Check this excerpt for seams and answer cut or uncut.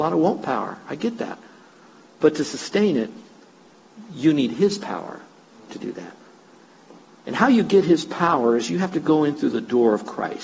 uncut